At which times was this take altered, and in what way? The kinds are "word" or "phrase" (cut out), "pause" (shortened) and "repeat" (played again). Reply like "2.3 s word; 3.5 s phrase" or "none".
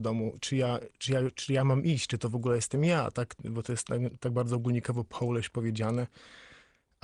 none